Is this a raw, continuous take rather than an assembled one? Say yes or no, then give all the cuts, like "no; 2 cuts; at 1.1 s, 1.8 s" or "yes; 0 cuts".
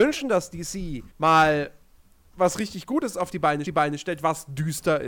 no; 2 cuts; at 1.1 s, 3.7 s